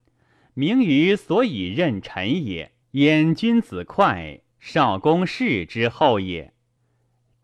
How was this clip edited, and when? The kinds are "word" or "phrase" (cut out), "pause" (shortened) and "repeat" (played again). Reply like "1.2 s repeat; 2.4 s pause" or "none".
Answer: 2.8 s pause